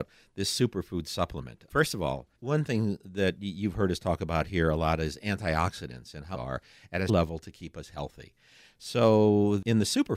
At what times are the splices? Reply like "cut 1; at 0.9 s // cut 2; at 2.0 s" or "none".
cut 1; at 2.4 s // cut 2; at 6.3 s // cut 3; at 7.1 s